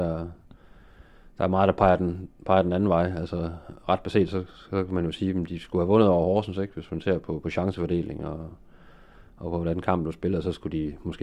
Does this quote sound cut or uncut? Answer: uncut